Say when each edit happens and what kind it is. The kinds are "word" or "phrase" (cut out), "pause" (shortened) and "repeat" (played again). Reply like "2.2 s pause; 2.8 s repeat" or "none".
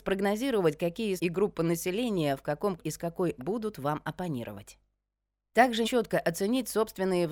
1.2 s word; 2.8 s word; 3.4 s word; 5.8 s word